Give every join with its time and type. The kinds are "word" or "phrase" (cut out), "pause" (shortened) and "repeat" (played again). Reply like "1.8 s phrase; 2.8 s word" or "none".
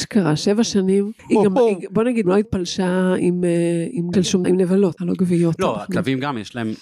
1.2 s pause; 2.2 s phrase; 4.1 s word; 4.4 s word; 5.0 s word